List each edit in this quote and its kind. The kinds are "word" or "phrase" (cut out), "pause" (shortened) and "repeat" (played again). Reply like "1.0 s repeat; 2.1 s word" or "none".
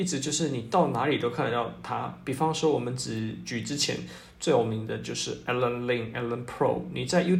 none